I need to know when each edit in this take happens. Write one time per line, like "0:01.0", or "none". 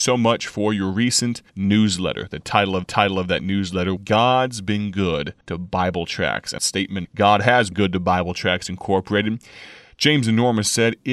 0:01.5
0:02.8
0:04.0
0:05.4
0:06.6
0:07.0
0:07.7